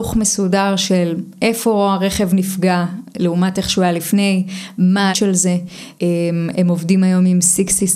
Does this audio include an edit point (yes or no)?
yes